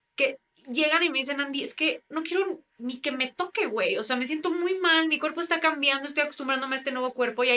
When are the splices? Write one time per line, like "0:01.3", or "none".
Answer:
0:02.1

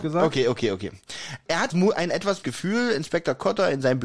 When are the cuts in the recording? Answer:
0:01.7
0:02.4

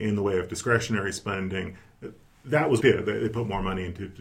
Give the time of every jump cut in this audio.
0:02.8

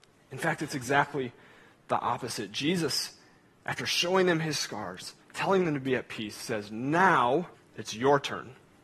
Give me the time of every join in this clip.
0:05.2
0:07.5

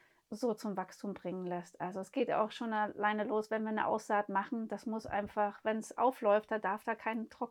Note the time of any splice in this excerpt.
none

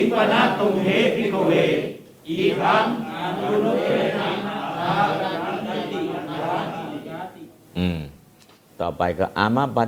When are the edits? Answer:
none

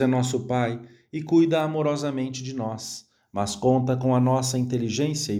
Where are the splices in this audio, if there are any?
none

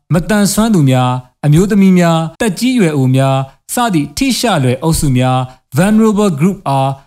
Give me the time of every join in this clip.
0:02.3

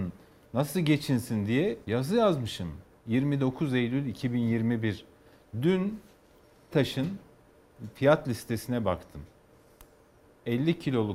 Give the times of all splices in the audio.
0:01.8
0:06.7

